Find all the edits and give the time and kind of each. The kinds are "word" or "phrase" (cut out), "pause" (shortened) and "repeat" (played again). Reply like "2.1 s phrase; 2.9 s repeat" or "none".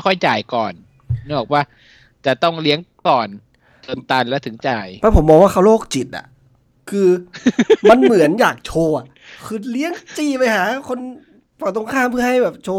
none